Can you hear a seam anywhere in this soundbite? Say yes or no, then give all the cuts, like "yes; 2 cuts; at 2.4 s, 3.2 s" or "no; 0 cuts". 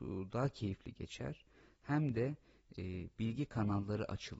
no; 0 cuts